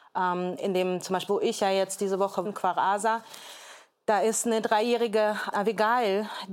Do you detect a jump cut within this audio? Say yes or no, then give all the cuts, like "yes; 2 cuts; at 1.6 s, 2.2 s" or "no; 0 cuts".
yes; 3 cuts; at 1.3 s, 2.4 s, 5.5 s